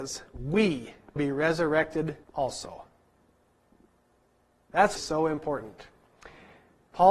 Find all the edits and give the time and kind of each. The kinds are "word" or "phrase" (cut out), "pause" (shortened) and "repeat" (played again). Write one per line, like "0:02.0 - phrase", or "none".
0:01.2 - word
0:02.2 - pause
0:05.0 - phrase